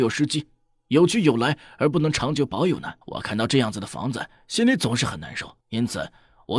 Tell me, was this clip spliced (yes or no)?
yes